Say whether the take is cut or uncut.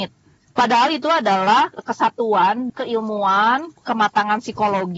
cut